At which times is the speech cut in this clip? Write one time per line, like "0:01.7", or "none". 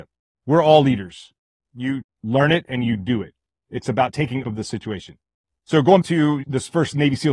0:02.0
0:04.4
0:06.0